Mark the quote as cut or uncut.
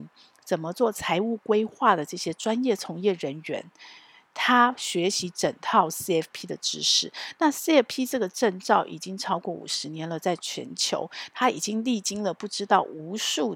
uncut